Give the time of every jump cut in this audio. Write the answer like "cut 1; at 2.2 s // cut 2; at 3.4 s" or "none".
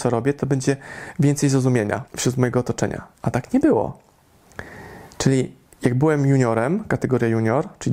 cut 1; at 2.1 s // cut 2; at 3.1 s